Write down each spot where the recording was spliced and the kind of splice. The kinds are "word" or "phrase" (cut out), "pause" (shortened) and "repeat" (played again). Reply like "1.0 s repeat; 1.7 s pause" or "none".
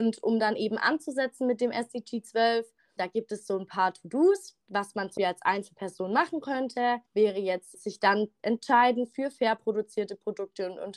3.0 s word; 4.6 s pause; 5.2 s word; 7.1 s pause; 7.7 s word